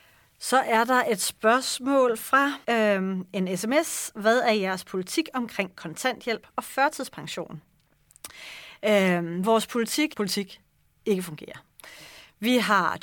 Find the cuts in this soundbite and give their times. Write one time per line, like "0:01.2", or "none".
0:02.6
0:10.1